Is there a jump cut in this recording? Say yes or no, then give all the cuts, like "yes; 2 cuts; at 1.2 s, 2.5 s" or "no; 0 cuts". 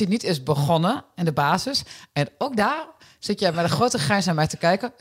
no; 0 cuts